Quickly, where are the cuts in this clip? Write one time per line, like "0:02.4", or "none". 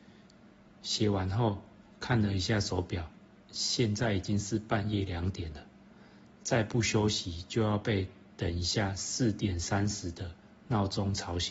0:03.4

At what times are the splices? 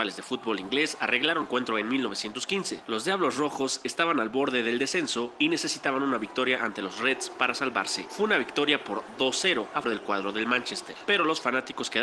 0:01.4
0:09.8

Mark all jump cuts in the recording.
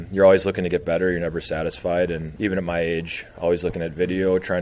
0:02.4

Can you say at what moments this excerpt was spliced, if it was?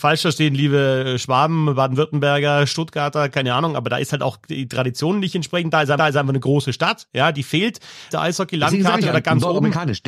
0:06.0
0:08.1

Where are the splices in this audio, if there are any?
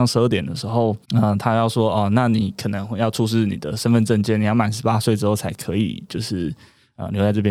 0:01.0

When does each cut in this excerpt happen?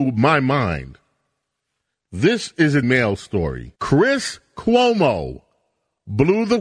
0:02.8
0:03.8

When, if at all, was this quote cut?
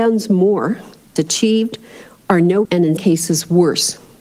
0:01.2
0:02.6
0:03.0

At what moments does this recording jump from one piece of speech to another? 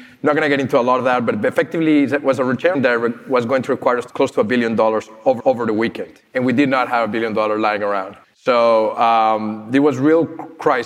0:02.7
0:04.1
0:05.4
0:06.3
0:08.2

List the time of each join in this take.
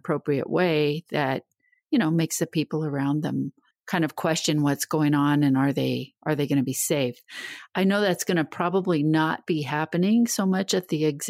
0:03.7

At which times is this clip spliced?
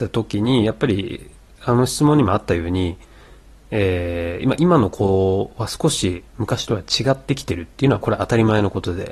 none

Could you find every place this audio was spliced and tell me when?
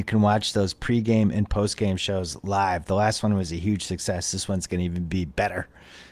none

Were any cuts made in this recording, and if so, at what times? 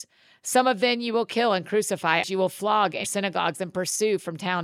0:02.2
0:03.0

